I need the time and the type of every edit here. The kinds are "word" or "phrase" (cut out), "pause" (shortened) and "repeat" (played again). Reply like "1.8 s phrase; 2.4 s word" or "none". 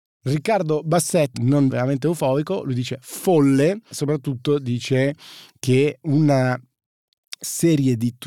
1.3 s word; 1.7 s word; 3.9 s word; 6.0 s word